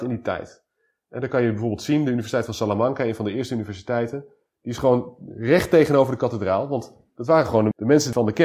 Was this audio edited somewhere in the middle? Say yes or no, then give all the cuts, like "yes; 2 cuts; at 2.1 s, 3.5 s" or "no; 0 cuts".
no; 0 cuts